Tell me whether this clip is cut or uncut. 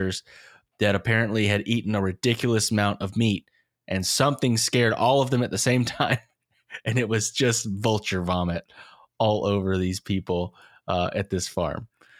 uncut